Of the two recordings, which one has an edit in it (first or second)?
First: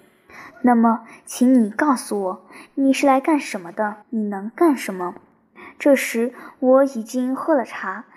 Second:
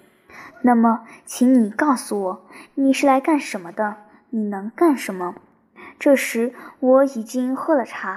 first